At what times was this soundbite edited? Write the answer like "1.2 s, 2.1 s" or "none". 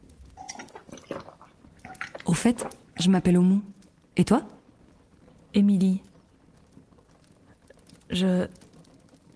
none